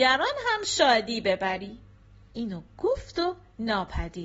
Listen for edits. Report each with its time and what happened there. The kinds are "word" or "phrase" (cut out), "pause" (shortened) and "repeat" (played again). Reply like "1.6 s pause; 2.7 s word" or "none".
2.3 s word